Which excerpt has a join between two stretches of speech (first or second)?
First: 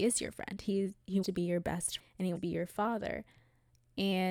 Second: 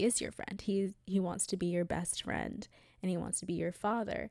first